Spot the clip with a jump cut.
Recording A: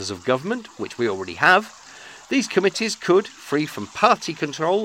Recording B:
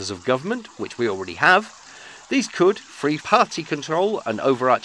B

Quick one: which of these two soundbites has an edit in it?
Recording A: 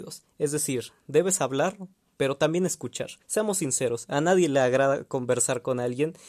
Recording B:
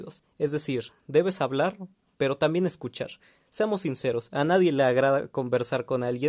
A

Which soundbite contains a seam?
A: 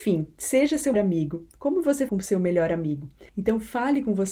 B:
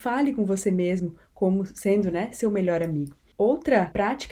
A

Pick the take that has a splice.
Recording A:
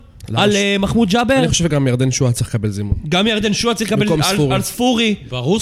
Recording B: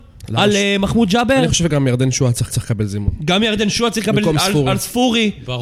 B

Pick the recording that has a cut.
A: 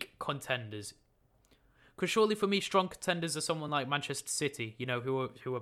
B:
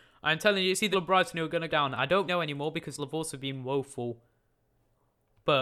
B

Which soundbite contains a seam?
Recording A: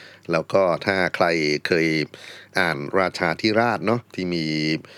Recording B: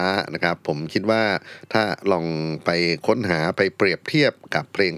A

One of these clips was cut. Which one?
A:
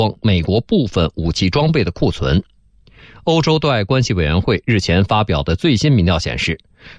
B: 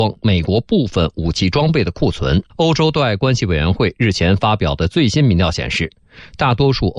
B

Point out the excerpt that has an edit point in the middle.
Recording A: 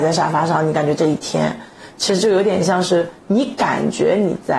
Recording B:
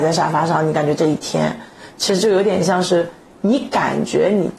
A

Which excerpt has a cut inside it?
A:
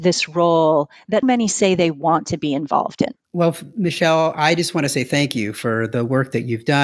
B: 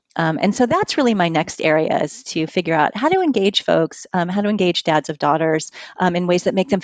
A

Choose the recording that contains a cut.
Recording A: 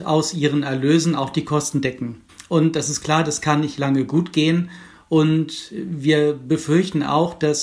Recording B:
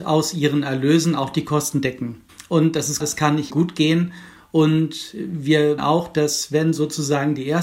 B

